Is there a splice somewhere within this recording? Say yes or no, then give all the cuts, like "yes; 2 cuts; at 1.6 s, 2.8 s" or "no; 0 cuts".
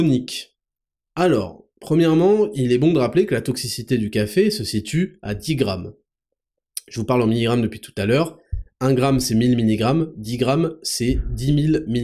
no; 0 cuts